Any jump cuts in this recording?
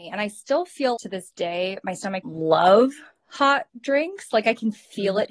yes; 3 cuts; at 1.0 s, 2.2 s, 3.7 s

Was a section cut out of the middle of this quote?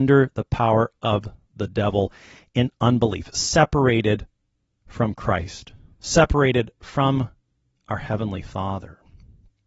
no; 0 cuts

